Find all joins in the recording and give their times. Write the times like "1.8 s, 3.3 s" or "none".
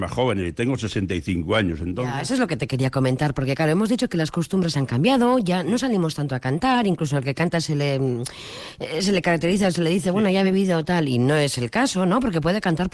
none